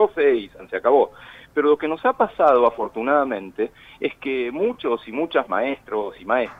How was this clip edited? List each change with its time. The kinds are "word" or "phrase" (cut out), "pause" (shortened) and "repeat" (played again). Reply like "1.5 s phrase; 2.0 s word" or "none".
none